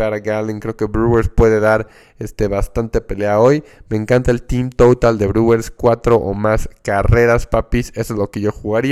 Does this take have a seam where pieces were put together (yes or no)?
no